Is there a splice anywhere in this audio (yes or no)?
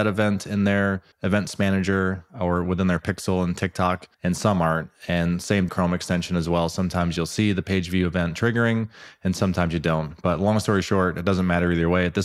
yes